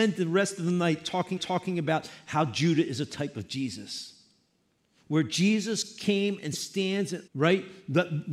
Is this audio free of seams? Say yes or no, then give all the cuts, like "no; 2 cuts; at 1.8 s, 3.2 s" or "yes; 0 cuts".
no; 2 cuts; at 1.4 s, 7.3 s